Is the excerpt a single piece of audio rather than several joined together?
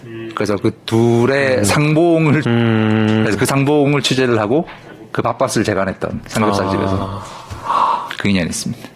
no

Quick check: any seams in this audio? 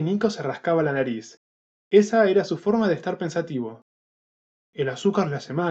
no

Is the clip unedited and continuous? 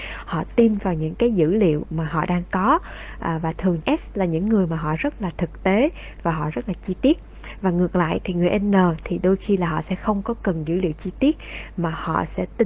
no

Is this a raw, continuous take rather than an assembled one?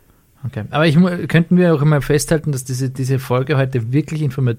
yes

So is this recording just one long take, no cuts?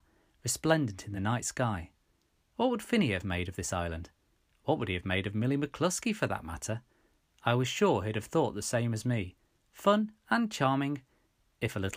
yes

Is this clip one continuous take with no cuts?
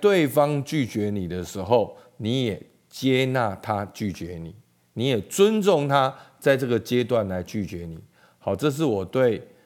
yes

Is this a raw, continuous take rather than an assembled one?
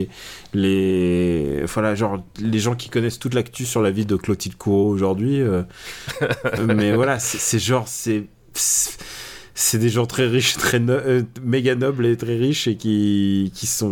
yes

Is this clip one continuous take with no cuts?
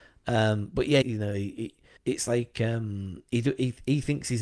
no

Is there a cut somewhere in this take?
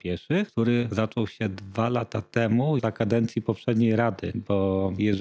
yes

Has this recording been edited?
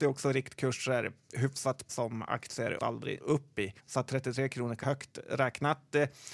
yes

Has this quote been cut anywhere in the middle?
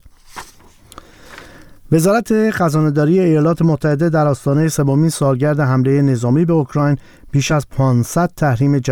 no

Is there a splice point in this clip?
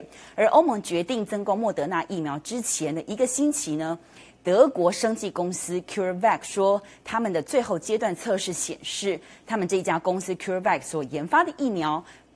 no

